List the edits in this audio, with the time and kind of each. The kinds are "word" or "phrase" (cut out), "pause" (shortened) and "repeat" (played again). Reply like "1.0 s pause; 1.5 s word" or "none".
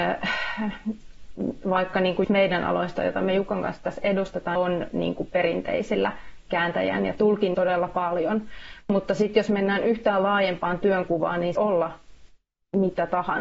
2.2 s word; 4.6 s phrase; 7.5 s phrase; 11.6 s phrase